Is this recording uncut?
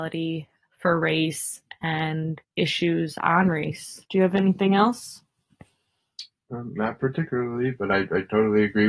no; 2 cuts; at 2.4 s, 4.0 s

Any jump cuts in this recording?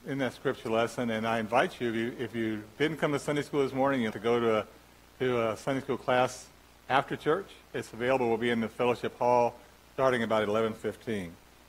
yes; 1 cut; at 4.1 s

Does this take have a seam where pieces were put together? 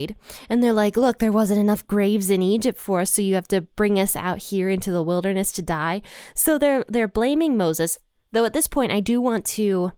no; 0 cuts

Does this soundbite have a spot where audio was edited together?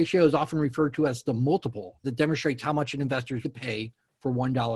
yes; 2 cuts; at 2.0 s, 3.4 s

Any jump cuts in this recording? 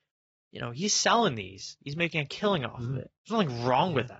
yes; 1 cut; at 3.2 s

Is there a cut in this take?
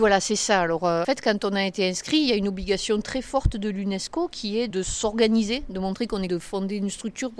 yes; 3 cuts; at 1.0 s, 4.7 s, 6.3 s

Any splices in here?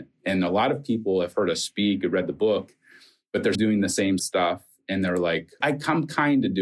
yes; 3 cuts; at 3.5 s, 4.2 s, 5.6 s

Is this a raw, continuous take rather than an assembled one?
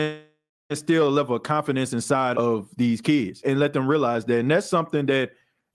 no; 2 cuts; at 2.3 s, 3.4 s

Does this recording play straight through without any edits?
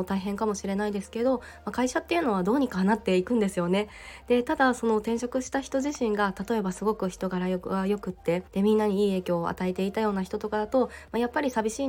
no; 1 cut; at 8.5 s

